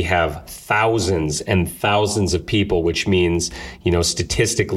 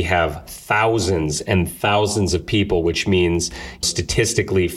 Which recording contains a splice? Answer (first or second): second